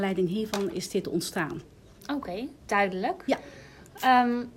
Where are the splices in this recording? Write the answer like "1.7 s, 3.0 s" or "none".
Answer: 2.6 s